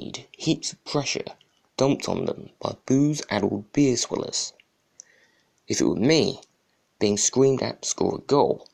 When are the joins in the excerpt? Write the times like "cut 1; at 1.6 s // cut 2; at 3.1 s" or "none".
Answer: none